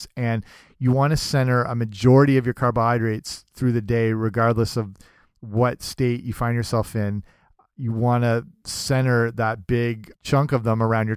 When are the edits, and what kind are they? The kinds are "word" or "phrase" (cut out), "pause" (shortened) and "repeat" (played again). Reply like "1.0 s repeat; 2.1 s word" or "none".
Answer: 10.1 s word